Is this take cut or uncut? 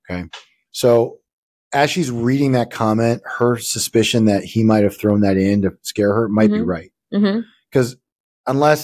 uncut